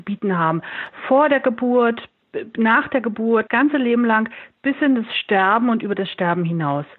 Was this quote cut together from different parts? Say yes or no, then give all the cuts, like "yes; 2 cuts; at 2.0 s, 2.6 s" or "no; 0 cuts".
yes; 1 cut; at 3.5 s